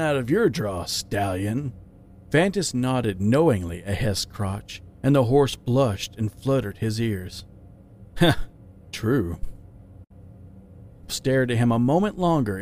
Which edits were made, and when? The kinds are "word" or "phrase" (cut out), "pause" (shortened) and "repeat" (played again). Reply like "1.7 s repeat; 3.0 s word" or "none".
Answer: 11.1 s word